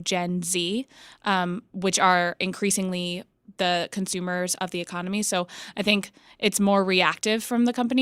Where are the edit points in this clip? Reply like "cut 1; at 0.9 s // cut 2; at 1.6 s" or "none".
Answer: none

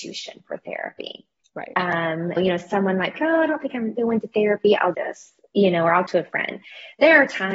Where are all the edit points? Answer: cut 1; at 2.4 s // cut 2; at 3.1 s // cut 3; at 4.0 s // cut 4; at 4.9 s // cut 5; at 6.1 s

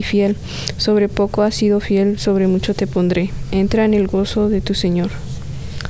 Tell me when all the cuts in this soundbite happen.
none

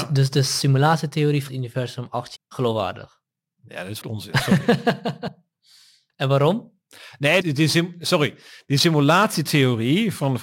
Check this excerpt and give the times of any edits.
cut 1; at 1.5 s // cut 2; at 2.4 s // cut 3; at 4.0 s // cut 4; at 7.4 s

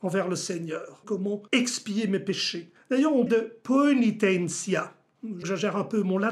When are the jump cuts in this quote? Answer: cut 1; at 1.0 s // cut 2; at 1.5 s // cut 3; at 2.8 s // cut 4; at 3.3 s // cut 5; at 5.4 s

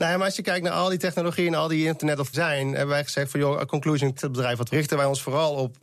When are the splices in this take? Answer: cut 1; at 2.3 s // cut 2; at 4.2 s // cut 3; at 4.7 s

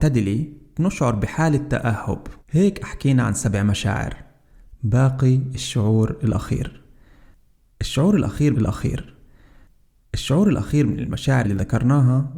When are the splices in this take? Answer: cut 1; at 2.4 s // cut 2; at 8.5 s // cut 3; at 11.4 s

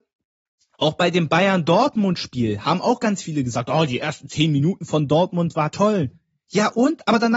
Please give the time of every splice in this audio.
none

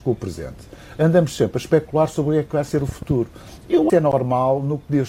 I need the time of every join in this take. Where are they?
cut 1; at 3.9 s

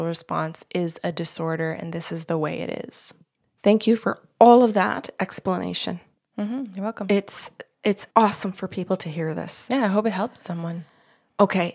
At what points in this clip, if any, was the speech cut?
cut 1; at 8.1 s

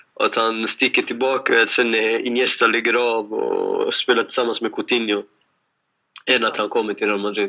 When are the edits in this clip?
none

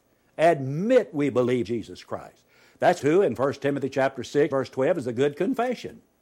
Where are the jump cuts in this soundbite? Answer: cut 1; at 1.6 s // cut 2; at 3.0 s // cut 3; at 4.5 s

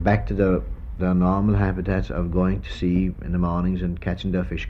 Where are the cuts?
cut 1; at 1.0 s

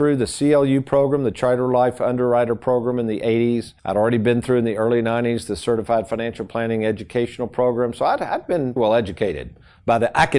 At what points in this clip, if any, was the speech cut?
cut 1; at 3.8 s // cut 2; at 8.8 s

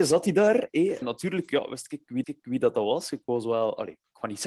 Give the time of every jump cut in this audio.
cut 1; at 1.0 s // cut 2; at 2.2 s

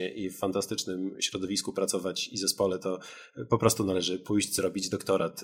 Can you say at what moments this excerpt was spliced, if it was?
none

